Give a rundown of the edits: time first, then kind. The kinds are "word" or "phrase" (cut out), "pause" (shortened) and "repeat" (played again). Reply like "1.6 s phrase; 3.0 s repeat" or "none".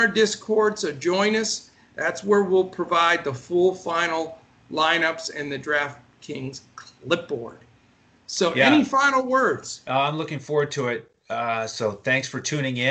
none